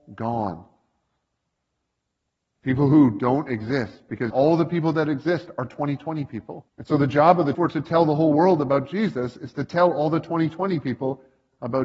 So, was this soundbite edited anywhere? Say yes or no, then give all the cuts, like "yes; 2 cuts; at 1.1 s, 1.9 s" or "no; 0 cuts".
yes; 3 cuts; at 4.3 s, 6.7 s, 7.5 s